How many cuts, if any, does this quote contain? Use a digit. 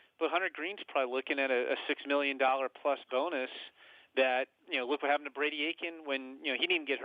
0